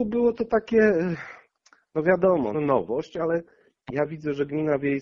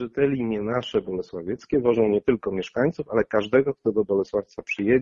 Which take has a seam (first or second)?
first